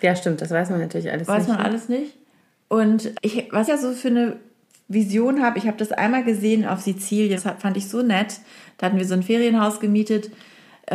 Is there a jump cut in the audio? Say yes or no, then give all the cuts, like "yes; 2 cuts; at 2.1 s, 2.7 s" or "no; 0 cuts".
yes; 3 cuts; at 3.1 s, 3.7 s, 7.4 s